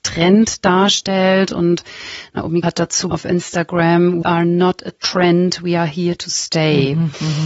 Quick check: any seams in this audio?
yes; 3 cuts; at 2.6 s, 3.1 s, 4.2 s

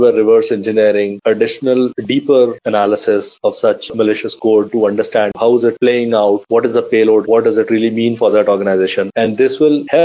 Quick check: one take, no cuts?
no; 1 cut; at 7.2 s

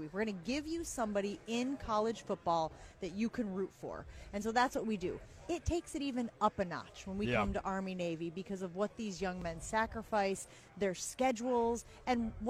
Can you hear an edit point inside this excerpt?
no; 0 cuts

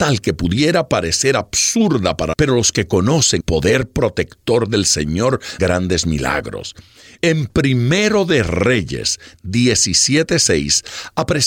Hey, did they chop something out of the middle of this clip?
yes; 3 cuts; at 2.3 s, 3.4 s, 5.6 s

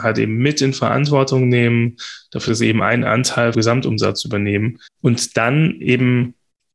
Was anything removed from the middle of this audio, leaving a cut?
yes; 3 cuts; at 2.5 s, 3.5 s, 4.9 s

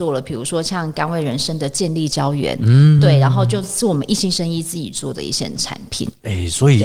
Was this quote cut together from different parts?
no; 0 cuts

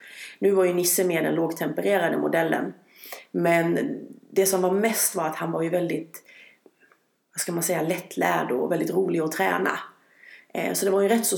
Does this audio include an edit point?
no; 0 cuts

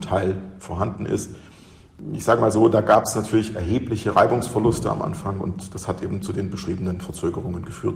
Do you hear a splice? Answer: no; 0 cuts

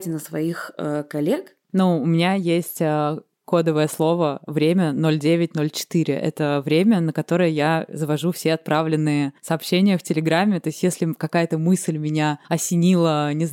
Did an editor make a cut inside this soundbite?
yes; 2 cuts; at 9.4 s, 12.4 s

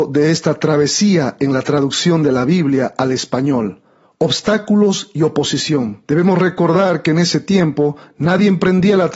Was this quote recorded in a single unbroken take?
yes; 0 cuts

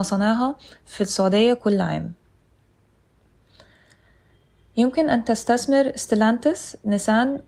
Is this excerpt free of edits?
yes; 0 cuts

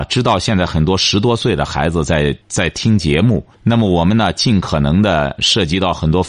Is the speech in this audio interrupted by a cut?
yes; 2 cuts; at 2.4 s, 3.5 s

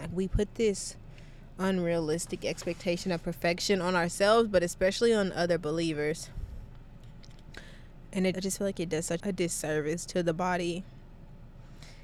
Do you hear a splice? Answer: yes; 2 cuts; at 8.3 s, 9.2 s

